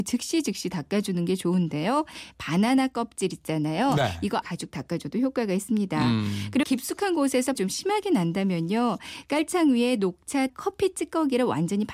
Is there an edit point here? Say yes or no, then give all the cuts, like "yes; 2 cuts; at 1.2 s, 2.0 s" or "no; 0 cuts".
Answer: yes; 4 cuts; at 4.4 s, 6.6 s, 7.5 s, 10.5 s